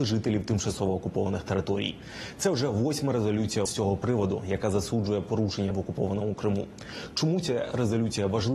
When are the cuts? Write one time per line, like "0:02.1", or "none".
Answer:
0:03.7
0:05.7